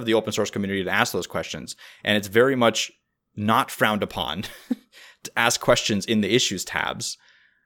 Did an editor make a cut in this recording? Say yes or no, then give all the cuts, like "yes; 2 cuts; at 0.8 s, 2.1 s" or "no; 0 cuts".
no; 0 cuts